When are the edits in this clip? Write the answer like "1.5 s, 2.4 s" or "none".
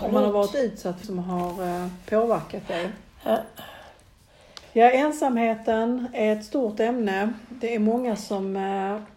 1.0 s, 4.6 s